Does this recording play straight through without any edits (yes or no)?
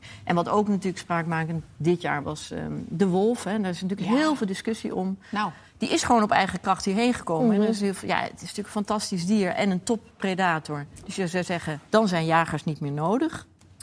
no